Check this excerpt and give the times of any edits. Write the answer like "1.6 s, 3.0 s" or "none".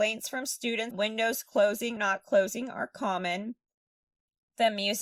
0.9 s, 2.0 s